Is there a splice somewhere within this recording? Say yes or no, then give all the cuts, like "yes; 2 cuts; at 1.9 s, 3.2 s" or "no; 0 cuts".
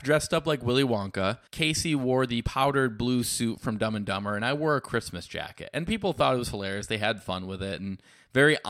yes; 1 cut; at 1.5 s